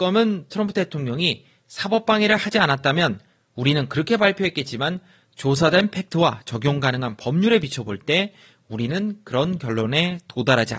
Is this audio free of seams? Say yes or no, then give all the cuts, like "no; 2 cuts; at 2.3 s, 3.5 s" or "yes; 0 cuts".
yes; 0 cuts